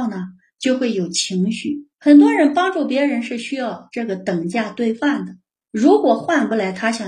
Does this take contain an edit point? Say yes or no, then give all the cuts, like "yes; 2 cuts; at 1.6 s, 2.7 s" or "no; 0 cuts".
yes; 1 cut; at 1.9 s